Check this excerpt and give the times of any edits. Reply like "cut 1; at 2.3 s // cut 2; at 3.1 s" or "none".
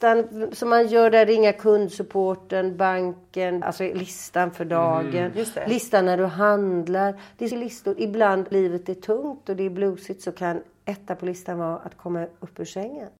cut 1; at 3.6 s // cut 2; at 7.5 s // cut 3; at 8.5 s